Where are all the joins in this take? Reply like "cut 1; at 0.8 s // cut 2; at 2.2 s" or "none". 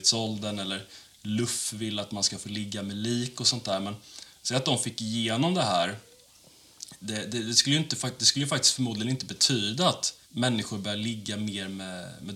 cut 1; at 10.2 s